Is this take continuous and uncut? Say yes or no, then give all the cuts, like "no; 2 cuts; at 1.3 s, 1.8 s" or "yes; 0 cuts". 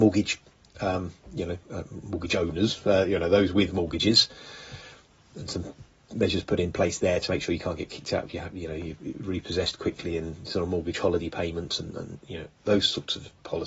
yes; 0 cuts